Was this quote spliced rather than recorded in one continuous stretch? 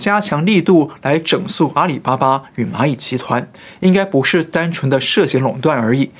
no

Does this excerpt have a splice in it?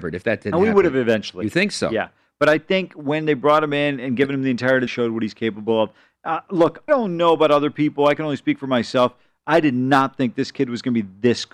yes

